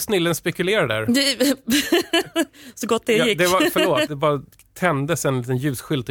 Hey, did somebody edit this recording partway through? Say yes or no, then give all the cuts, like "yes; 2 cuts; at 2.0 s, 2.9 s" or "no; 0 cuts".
no; 0 cuts